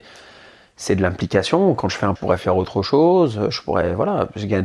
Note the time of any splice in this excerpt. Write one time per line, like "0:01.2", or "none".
0:02.2